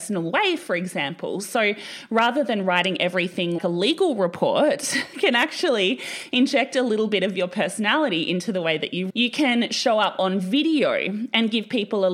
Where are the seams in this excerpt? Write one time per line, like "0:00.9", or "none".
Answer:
0:03.6
0:05.1
0:09.1